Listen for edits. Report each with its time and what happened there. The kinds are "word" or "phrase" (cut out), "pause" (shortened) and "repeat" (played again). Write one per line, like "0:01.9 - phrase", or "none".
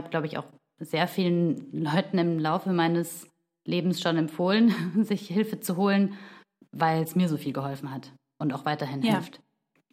none